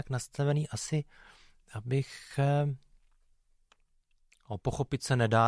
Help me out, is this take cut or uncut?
uncut